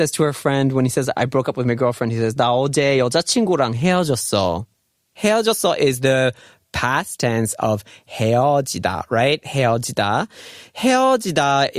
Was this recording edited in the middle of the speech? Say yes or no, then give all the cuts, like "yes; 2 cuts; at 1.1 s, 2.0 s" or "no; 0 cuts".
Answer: no; 0 cuts